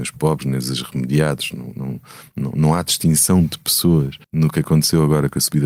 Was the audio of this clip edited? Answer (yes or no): yes